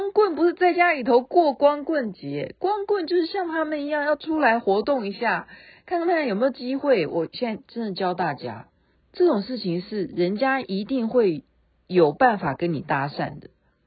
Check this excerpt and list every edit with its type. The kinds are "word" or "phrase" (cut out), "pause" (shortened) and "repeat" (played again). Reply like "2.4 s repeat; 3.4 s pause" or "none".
8.9 s phrase